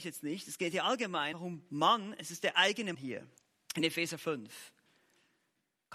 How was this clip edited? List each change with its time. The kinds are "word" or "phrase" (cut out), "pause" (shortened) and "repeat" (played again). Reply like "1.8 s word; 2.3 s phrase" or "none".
1.3 s word; 2.9 s word; 3.4 s pause